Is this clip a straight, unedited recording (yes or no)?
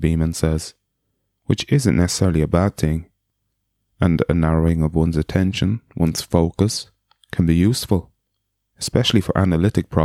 yes